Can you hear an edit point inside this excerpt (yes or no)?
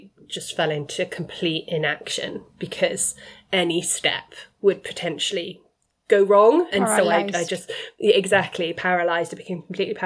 no